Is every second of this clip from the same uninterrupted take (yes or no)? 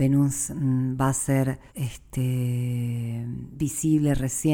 no